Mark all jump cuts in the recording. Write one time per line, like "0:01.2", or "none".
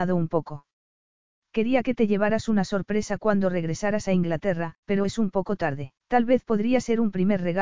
0:04.8
0:06.0